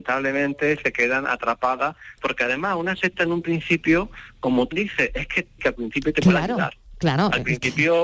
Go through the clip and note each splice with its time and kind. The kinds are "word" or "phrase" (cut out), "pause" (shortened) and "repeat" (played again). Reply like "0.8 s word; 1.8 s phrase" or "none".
2.2 s word; 4.7 s word; 5.6 s word